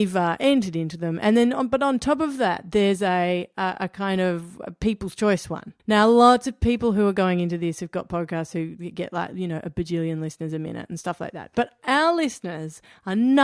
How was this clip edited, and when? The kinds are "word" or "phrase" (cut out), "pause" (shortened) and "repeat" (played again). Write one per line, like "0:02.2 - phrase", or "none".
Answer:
0:05.8 - pause